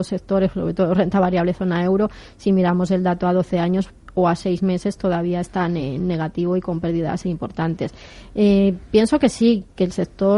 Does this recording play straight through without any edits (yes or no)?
yes